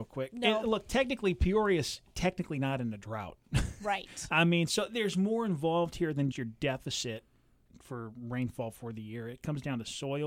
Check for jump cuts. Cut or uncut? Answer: cut